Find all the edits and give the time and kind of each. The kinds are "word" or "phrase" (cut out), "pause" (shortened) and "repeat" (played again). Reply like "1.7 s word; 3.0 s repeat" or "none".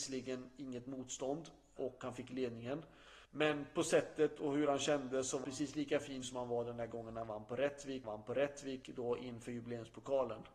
1.8 s word; 3.2 s pause; 5.4 s word; 6.2 s word; 8.0 s repeat